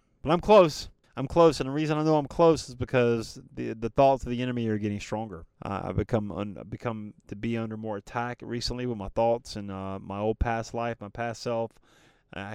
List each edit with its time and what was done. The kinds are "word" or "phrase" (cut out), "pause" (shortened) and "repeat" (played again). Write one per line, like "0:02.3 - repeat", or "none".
0:01.0 - pause
0:05.5 - pause